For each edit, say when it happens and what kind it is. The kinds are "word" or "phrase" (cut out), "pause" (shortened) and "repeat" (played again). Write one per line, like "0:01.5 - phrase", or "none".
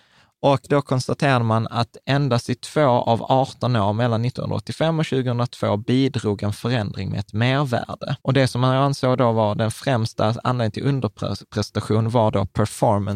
0:08.2 - pause